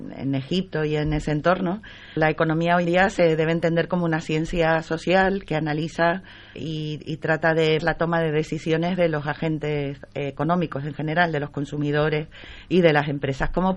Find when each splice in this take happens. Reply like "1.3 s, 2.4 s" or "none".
2.2 s, 2.8 s, 6.5 s, 7.8 s